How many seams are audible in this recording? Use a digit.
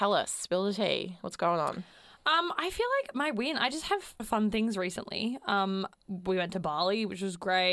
1